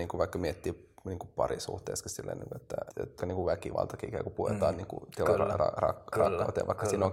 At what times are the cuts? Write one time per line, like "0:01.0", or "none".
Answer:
0:02.9
0:03.2

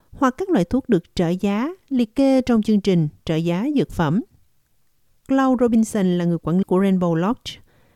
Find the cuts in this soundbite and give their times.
0:06.6

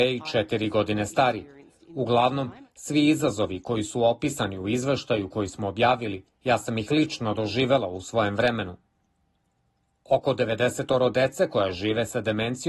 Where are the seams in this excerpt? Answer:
0:06.3

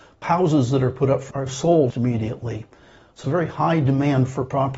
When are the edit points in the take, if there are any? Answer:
0:01.3
0:01.9
0:03.2

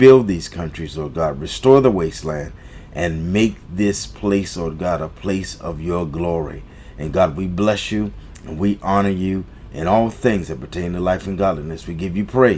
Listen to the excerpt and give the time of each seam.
none

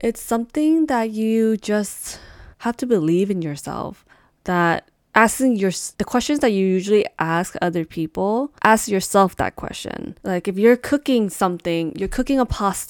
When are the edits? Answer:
0:02.5
0:04.1
0:05.9
0:08.6
0:10.2

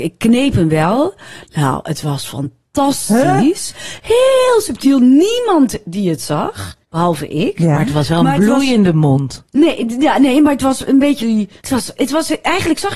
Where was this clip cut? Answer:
0:06.8
0:11.2
0:11.6
0:12.0

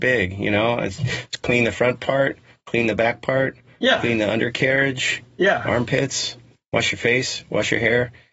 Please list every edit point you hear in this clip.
none

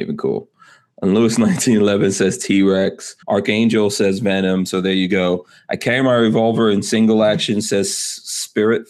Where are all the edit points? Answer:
0:03.2

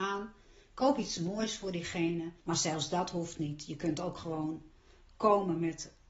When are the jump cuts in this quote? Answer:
0:02.4

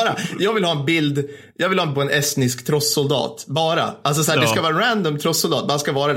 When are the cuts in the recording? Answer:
0:01.9

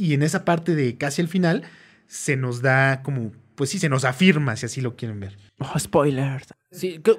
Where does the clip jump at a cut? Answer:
none

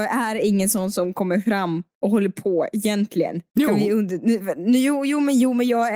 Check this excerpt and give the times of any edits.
0:01.9
0:03.5

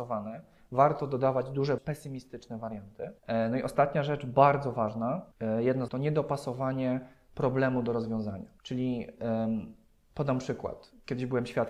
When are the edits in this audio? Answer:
0:01.8
0:03.2
0:05.3
0:05.9
0:08.6

